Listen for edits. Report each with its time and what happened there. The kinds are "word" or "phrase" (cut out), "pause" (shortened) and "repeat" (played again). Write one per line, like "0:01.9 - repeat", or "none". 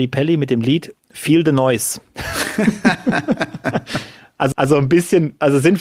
0:01.0 - pause
0:04.5 - repeat

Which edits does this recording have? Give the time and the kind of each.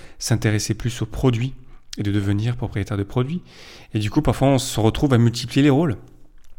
none

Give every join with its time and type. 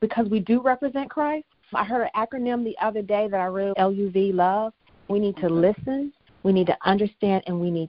0:01.7 - word
0:03.7 - word
0:05.1 - word

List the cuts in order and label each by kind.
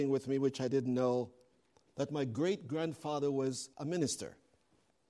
0:03.7 - pause

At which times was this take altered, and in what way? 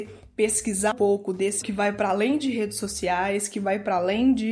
0:00.9 - word
0:01.6 - word

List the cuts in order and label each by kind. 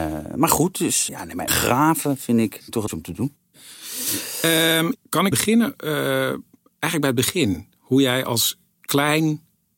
0:01.1 - word
0:01.5 - word
0:02.9 - word
0:05.3 - word

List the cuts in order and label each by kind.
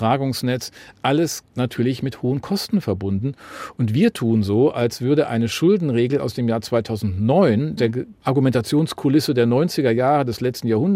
0:07.8 - word

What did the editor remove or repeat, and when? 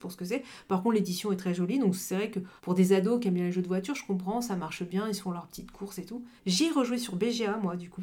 0:02.6 - pause
0:06.4 - pause

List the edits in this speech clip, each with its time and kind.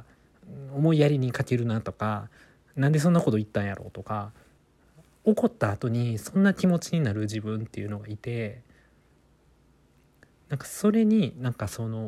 none

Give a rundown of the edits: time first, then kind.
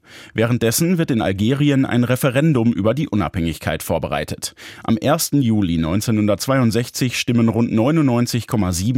none

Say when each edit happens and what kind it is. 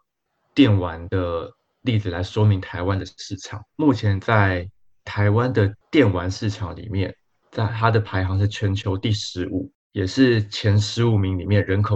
0:03.7 - word

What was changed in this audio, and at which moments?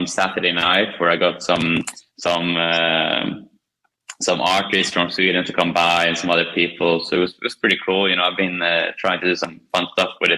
none

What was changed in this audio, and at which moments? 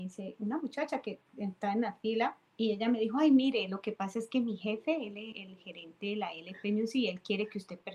0:01.3 - pause
0:02.5 - pause
0:05.3 - word

